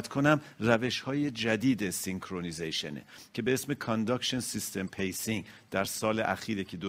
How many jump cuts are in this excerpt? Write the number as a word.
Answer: zero